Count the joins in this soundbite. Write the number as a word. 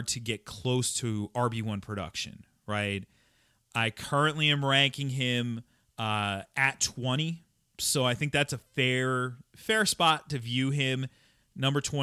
zero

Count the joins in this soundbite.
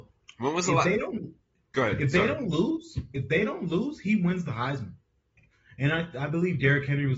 zero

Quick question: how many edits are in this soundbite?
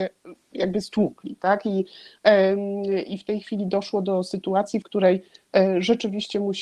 zero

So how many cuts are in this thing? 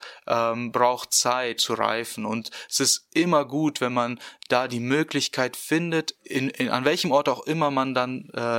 two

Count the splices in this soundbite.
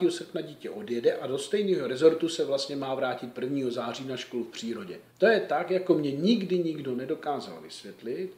one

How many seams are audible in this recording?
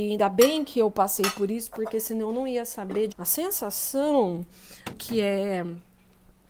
two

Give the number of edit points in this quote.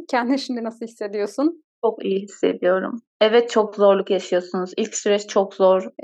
zero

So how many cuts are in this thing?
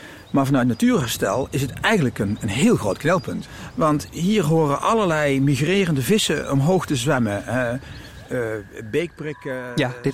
zero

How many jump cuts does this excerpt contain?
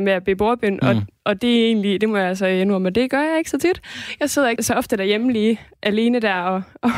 one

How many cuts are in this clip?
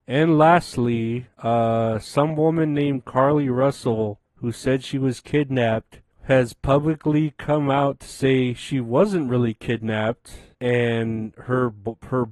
four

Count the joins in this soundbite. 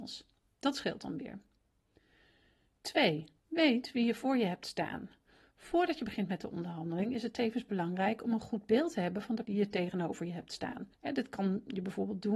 three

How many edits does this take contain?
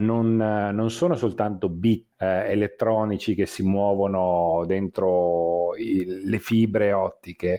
one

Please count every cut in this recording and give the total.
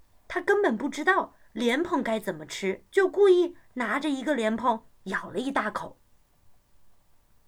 two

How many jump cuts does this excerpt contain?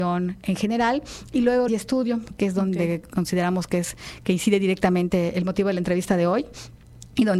one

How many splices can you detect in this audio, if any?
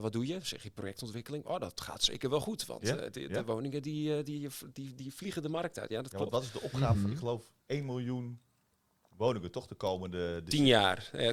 one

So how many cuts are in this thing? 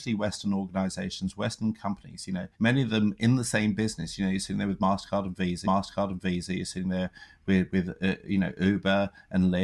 two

